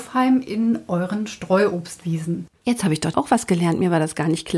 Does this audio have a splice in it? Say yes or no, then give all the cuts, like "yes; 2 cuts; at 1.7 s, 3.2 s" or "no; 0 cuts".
yes; 1 cut; at 3.1 s